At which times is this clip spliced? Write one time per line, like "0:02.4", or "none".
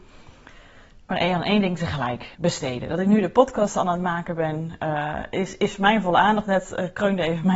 0:02.3